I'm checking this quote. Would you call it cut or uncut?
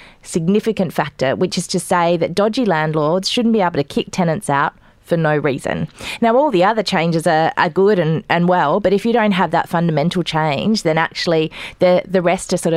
uncut